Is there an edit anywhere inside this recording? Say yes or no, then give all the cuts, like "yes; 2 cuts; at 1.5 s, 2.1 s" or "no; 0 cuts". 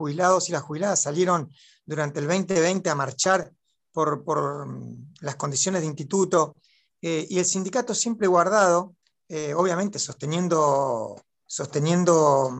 no; 0 cuts